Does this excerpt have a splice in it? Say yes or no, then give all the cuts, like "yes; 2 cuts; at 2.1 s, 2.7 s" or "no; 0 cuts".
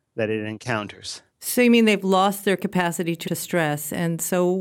yes; 2 cuts; at 1.3 s, 3.2 s